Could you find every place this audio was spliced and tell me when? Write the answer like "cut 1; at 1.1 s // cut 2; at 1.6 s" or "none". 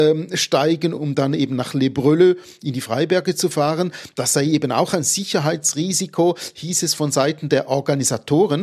none